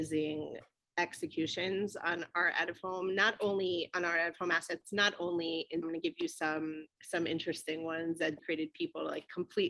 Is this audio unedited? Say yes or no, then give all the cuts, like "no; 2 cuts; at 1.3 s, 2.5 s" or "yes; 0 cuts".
no; 3 cuts; at 5.8 s, 6.9 s, 8.4 s